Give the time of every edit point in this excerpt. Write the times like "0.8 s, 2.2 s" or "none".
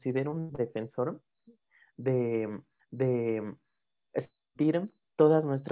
2.8 s